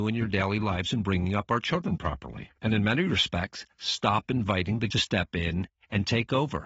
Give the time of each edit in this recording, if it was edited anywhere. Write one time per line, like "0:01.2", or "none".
0:04.9